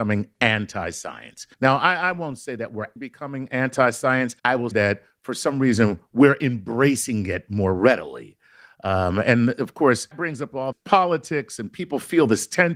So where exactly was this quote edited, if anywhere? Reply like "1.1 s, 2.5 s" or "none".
1.5 s, 3.0 s, 4.4 s, 4.7 s, 10.1 s, 10.7 s